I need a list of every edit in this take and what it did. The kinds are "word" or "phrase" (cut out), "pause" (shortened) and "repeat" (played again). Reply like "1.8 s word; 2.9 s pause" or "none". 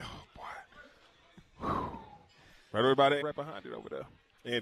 3.2 s word